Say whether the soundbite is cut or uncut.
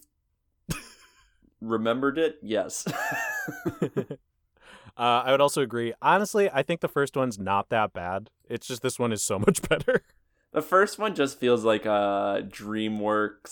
uncut